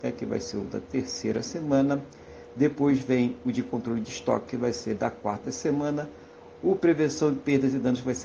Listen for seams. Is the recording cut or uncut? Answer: uncut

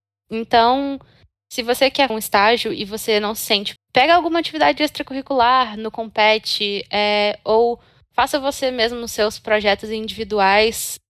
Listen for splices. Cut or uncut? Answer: cut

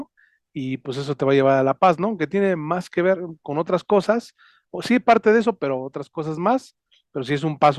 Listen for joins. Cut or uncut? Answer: uncut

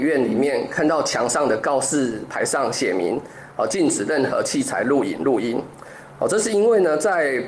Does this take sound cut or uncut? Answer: uncut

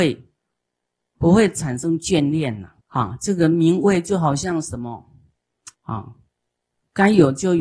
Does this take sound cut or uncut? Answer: cut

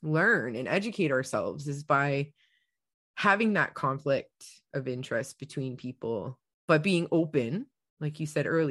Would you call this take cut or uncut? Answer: uncut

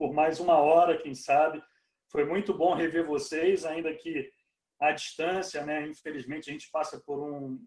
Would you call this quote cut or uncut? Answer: uncut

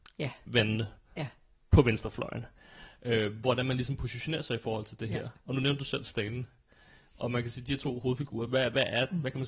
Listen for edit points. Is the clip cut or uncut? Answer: uncut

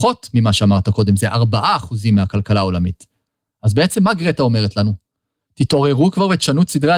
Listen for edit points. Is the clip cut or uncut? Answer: uncut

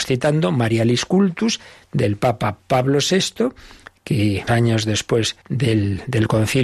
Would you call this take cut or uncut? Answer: cut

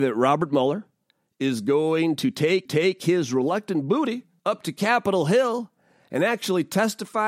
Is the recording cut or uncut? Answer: cut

